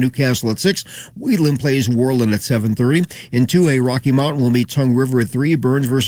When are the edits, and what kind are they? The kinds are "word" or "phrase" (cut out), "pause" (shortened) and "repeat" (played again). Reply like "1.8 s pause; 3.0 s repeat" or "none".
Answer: none